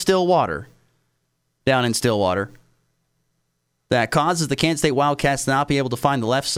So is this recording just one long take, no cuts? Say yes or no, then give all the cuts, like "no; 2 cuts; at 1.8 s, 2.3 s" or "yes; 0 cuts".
yes; 0 cuts